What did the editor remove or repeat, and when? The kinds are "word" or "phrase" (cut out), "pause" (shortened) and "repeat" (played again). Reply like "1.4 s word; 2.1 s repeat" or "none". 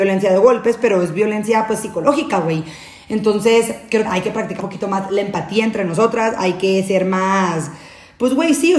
4.0 s phrase; 4.6 s word